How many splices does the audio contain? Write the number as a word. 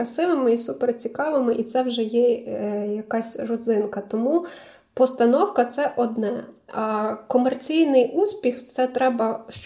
zero